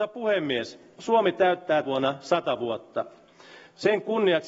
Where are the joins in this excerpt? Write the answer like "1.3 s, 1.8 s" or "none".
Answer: 1.8 s